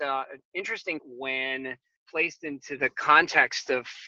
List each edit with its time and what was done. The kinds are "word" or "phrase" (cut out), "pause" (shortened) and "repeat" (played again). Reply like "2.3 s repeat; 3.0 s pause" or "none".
1.0 s word; 2.0 s word